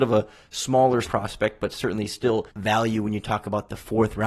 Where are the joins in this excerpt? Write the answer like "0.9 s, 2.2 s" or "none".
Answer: 1.0 s, 2.5 s